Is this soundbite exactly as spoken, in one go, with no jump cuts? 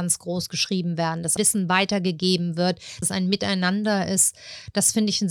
no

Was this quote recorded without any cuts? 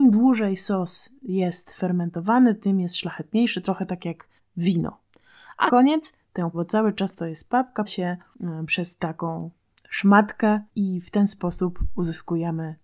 no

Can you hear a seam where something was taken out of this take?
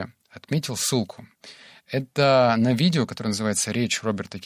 no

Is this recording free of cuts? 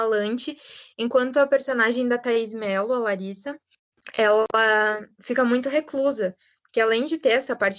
yes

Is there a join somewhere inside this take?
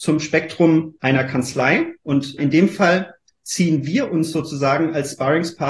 yes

